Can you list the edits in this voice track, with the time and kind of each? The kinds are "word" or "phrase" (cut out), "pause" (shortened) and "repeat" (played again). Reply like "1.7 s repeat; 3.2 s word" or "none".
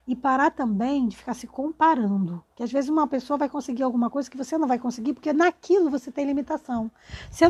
2.5 s pause